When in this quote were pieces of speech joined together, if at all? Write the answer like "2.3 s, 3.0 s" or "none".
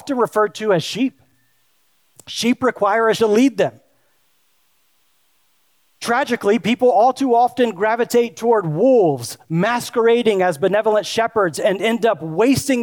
3.2 s